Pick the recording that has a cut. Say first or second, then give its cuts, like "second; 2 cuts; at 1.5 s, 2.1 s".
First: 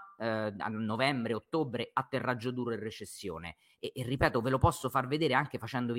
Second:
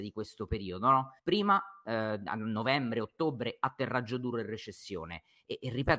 second; 1 cut; at 1.2 s